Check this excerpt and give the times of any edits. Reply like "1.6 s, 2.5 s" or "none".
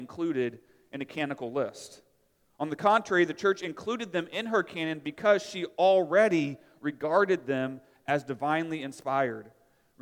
none